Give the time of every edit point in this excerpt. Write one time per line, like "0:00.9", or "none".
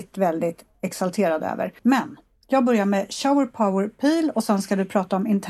0:01.8